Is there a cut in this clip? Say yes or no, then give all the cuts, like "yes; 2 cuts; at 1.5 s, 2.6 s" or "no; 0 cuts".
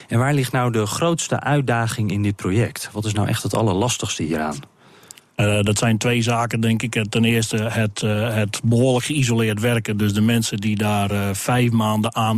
no; 0 cuts